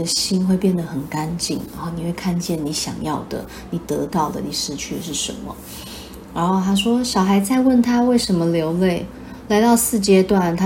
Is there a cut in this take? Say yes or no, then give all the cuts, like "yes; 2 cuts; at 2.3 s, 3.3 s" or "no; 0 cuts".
no; 0 cuts